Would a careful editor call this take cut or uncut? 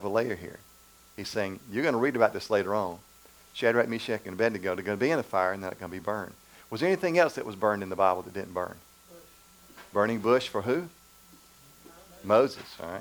uncut